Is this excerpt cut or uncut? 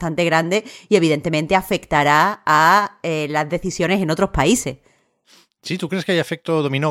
uncut